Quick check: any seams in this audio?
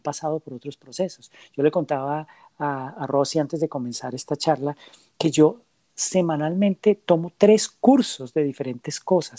no; 0 cuts

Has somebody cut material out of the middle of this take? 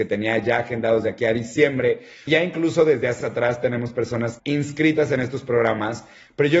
yes; 3 cuts; at 2.3 s, 3.2 s, 4.4 s

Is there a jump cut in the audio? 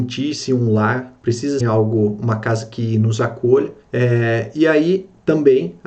yes; 2 cuts; at 1.6 s, 3.8 s

